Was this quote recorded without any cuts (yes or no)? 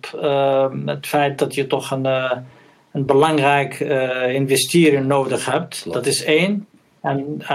yes